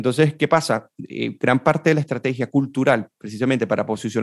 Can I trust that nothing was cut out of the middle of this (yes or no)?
yes